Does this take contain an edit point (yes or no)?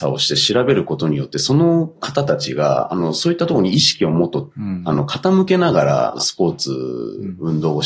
no